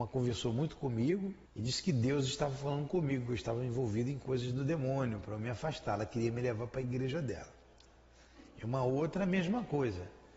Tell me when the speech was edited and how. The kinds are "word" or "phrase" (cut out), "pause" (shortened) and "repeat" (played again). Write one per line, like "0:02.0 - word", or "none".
0:01.5 - pause